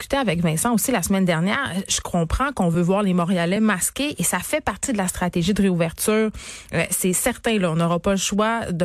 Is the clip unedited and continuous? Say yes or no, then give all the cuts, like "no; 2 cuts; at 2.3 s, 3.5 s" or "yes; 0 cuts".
yes; 0 cuts